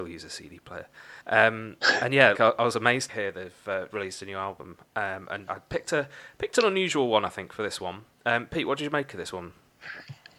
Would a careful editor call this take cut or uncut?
cut